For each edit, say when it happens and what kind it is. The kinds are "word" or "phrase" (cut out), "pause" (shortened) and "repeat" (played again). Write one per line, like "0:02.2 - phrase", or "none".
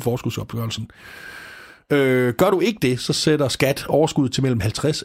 none